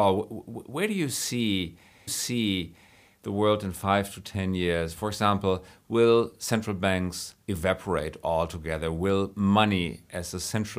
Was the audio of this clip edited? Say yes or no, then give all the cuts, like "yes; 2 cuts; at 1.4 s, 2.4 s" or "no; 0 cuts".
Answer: yes; 2 cuts; at 2.1 s, 7.4 s